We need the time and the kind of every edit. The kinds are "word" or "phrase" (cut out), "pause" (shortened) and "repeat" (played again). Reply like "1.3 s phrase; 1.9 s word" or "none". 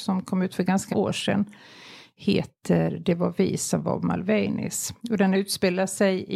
0.9 s word; 5.0 s pause